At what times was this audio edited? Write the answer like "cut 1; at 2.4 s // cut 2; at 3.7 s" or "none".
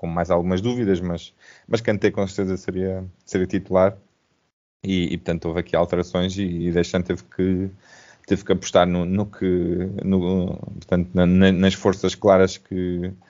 none

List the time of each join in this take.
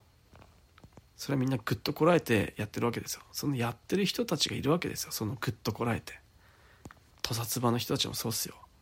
cut 1; at 1.1 s // cut 2; at 7.1 s

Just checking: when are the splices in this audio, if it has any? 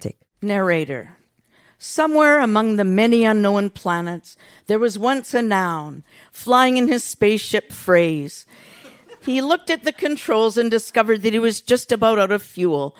none

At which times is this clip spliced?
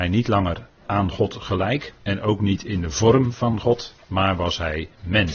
cut 1; at 2.0 s // cut 2; at 4.0 s

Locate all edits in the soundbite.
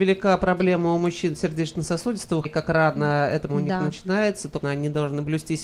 cut 1; at 2.4 s // cut 2; at 3.5 s // cut 3; at 4.6 s

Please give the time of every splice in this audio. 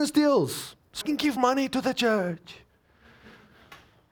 cut 1; at 1.0 s // cut 2; at 1.4 s

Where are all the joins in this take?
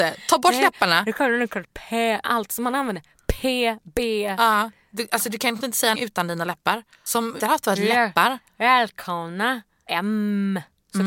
cut 1; at 1.6 s // cut 2; at 2.2 s // cut 3; at 5.6 s // cut 4; at 6.0 s // cut 5; at 7.4 s // cut 6; at 9.9 s

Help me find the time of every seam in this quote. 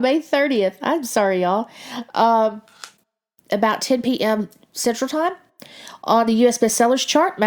none

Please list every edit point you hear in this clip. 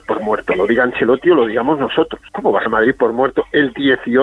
cut 1; at 2.3 s // cut 2; at 2.7 s

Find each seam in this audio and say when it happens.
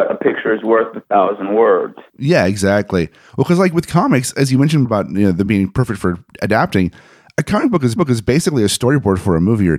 cut 1; at 4.8 s // cut 2; at 5.5 s // cut 3; at 8.0 s

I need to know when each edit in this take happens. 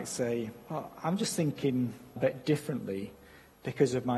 cut 1; at 2.2 s

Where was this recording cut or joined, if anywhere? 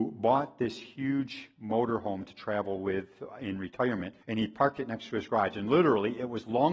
cut 1; at 4.2 s

